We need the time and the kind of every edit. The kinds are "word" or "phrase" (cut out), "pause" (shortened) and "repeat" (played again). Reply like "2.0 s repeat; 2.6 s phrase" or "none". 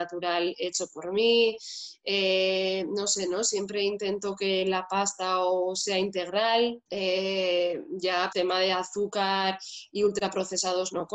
6.9 s pause; 8.3 s word